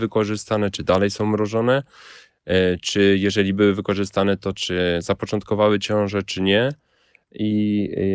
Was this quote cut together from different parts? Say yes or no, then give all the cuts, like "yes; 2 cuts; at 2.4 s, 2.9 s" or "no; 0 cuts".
no; 0 cuts